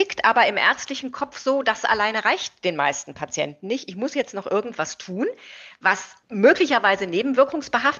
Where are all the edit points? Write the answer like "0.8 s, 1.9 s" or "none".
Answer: 6.2 s